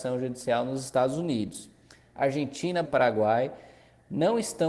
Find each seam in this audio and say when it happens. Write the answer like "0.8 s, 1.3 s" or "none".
2.8 s